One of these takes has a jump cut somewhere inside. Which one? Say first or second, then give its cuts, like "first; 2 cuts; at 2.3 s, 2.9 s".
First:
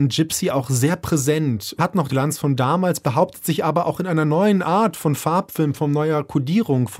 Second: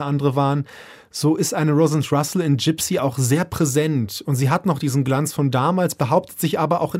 first; 2 cuts; at 1.8 s, 2.1 s